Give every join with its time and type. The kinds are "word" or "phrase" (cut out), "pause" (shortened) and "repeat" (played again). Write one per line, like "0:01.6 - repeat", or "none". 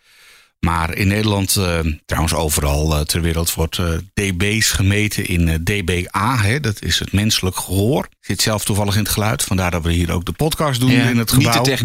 0:08.2 - pause